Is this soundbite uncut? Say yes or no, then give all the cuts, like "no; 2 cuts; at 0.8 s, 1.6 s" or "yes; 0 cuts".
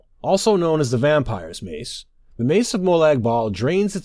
yes; 0 cuts